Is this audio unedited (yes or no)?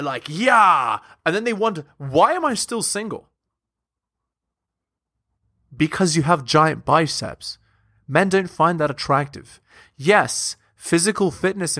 yes